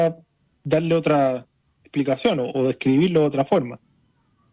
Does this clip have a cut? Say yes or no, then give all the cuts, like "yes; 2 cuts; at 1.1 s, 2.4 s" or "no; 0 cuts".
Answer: no; 0 cuts